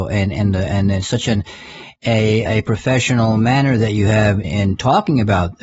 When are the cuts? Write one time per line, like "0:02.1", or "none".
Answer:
0:02.5
0:04.4